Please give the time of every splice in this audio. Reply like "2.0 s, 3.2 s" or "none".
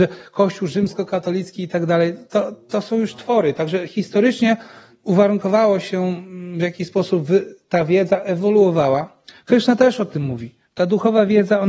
none